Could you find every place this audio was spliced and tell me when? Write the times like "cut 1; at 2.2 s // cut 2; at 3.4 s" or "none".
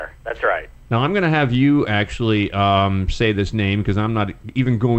none